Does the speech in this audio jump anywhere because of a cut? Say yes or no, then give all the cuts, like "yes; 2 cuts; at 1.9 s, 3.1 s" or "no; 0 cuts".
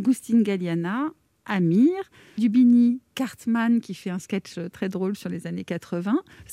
yes; 1 cut; at 2.4 s